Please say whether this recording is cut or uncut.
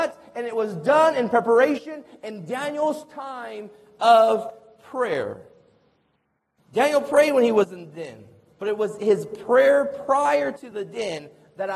uncut